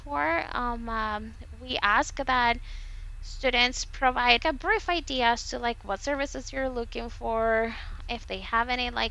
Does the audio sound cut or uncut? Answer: cut